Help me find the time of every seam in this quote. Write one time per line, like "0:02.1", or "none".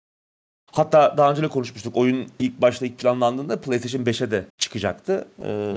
0:04.5